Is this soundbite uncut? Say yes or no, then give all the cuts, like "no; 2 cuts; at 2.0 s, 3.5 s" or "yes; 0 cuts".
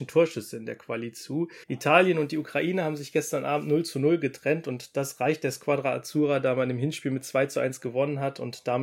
no; 1 cut; at 1.6 s